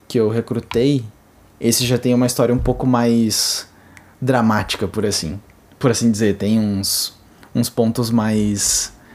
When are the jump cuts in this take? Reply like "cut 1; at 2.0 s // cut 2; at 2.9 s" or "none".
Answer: none